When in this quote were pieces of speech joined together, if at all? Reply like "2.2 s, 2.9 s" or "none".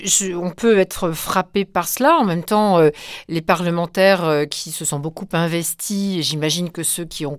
none